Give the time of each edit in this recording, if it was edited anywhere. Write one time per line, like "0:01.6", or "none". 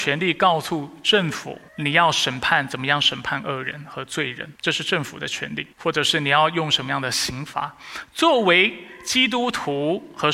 0:01.7
0:04.6
0:05.7